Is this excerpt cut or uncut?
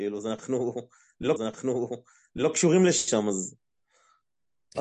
cut